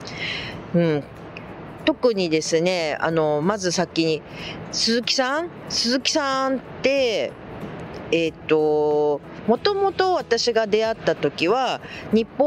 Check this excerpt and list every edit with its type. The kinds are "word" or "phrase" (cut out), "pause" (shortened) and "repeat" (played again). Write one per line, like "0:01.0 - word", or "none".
none